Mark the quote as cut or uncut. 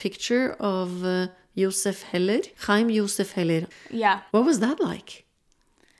cut